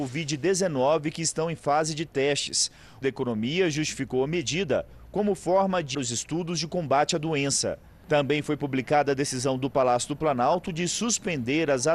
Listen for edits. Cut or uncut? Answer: cut